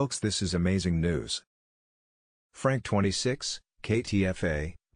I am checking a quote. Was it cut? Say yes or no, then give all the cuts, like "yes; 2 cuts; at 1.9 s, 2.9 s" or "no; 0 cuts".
no; 0 cuts